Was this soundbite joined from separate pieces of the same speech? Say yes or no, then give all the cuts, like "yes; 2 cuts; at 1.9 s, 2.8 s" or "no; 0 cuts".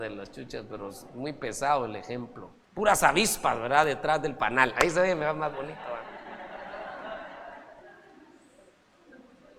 yes; 1 cut; at 2.6 s